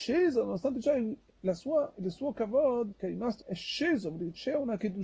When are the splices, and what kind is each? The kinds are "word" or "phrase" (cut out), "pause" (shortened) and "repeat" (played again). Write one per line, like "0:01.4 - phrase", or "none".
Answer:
0:01.3 - word
0:02.9 - word
0:03.4 - word